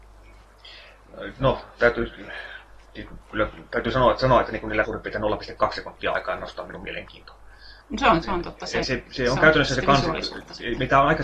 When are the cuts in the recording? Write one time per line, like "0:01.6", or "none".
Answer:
0:04.8
0:07.8
0:08.2
0:08.8